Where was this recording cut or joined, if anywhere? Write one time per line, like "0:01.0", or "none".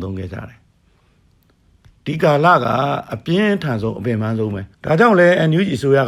0:04.7